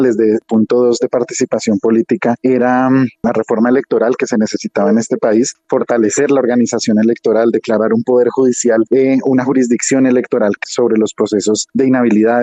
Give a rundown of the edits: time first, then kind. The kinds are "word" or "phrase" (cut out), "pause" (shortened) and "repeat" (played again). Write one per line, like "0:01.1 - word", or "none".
0:10.6 - word